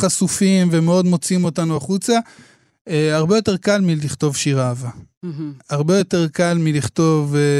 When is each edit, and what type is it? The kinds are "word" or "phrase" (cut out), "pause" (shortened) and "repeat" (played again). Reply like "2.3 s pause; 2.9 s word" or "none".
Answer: none